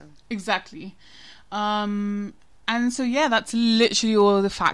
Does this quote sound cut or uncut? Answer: uncut